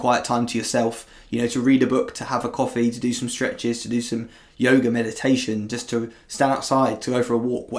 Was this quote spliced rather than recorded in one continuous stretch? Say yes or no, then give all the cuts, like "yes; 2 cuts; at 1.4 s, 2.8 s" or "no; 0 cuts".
no; 0 cuts